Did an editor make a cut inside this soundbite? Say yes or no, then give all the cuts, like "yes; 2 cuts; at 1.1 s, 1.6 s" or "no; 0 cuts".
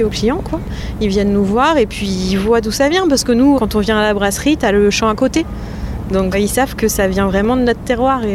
yes; 2 cuts; at 3.6 s, 6.3 s